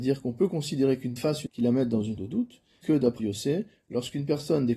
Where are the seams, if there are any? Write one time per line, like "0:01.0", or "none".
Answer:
0:01.2
0:01.5
0:02.2
0:02.8
0:03.2